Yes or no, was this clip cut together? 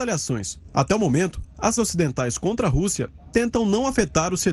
yes